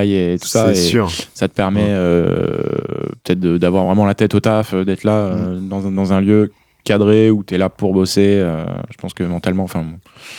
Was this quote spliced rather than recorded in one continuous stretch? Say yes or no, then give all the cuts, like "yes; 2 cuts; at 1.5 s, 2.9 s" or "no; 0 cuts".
no; 0 cuts